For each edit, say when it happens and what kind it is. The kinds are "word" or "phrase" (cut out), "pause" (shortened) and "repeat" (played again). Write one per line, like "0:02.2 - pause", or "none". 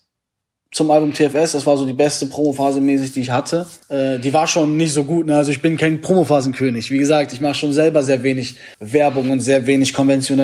0:03.8 - pause
0:08.7 - pause